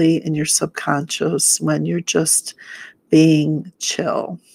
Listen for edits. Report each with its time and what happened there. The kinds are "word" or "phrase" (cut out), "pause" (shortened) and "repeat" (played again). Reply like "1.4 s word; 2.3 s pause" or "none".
none